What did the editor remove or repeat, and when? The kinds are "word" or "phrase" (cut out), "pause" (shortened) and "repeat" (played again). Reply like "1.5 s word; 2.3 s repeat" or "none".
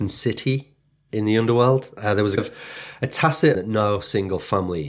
2.4 s word; 3.5 s word